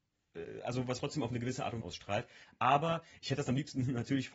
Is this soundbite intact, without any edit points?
no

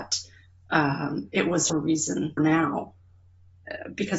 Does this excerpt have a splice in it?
yes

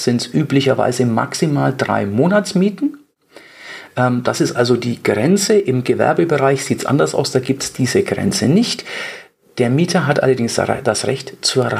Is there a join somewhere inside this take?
no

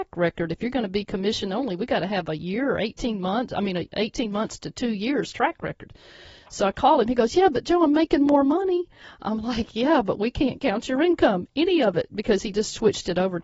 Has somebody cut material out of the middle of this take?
no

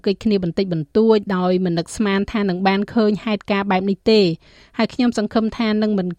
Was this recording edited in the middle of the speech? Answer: no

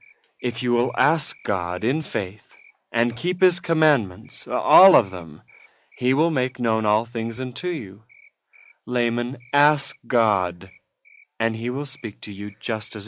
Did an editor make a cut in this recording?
no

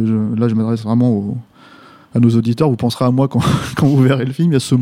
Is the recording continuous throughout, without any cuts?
yes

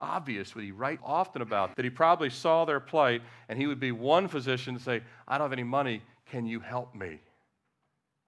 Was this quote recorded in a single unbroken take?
no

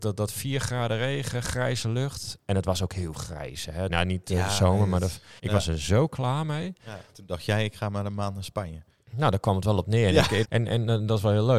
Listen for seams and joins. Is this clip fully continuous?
no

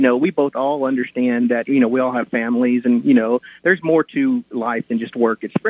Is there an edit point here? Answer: no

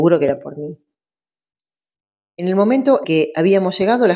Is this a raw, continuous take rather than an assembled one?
no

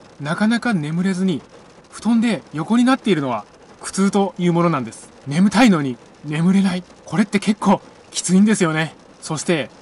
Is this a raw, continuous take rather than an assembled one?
yes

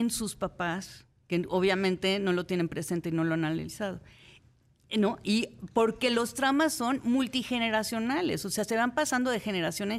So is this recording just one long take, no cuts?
yes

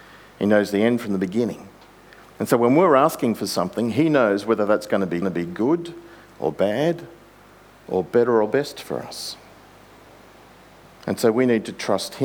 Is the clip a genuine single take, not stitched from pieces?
no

